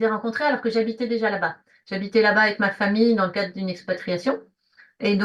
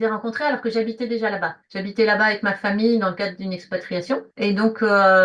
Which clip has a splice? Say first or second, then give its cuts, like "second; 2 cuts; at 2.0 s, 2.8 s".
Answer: second; 2 cuts; at 1.6 s, 4.3 s